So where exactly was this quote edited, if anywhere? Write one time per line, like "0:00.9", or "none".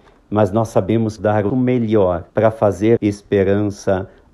0:01.2
0:01.5
0:02.3
0:03.0